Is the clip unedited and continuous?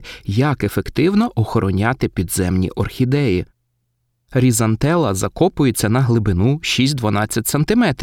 yes; 0 cuts

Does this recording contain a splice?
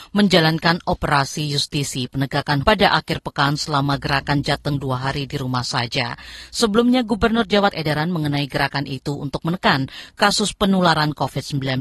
yes; 2 cuts; at 2.6 s, 7.7 s

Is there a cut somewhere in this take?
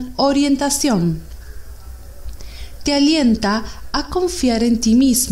no; 0 cuts

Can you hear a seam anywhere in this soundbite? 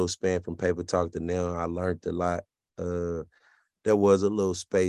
no; 0 cuts

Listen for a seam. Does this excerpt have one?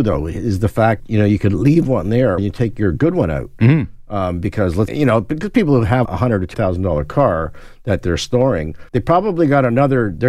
yes; 6 cuts; at 1.0 s, 2.4 s, 4.9 s, 6.0 s, 6.5 s, 8.9 s

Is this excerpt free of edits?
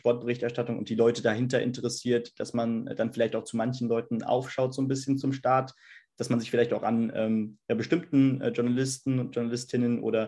yes; 0 cuts

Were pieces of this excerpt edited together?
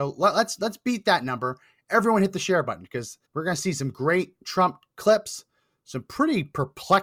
yes; 1 cut; at 3.2 s

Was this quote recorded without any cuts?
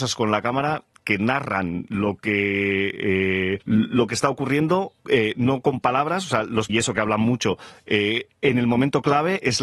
no; 3 cuts; at 3.6 s, 5.0 s, 6.7 s

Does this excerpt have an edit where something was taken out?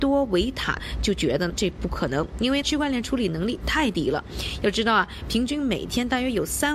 no; 0 cuts

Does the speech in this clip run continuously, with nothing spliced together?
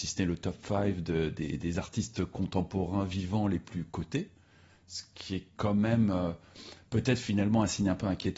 yes; 0 cuts

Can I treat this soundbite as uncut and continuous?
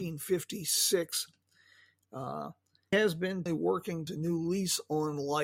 no; 3 cuts; at 2.9 s, 3.5 s, 4.1 s

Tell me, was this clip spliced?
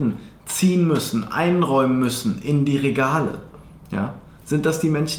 no; 0 cuts

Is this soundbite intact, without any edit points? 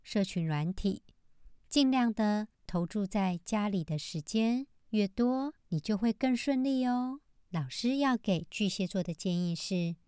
no; 4 cuts; at 1.6 s, 2.5 s, 5.6 s, 7.3 s

